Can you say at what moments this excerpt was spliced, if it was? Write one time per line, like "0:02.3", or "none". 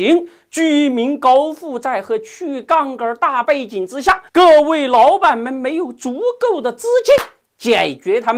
0:04.3